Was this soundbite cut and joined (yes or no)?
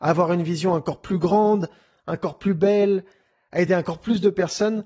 no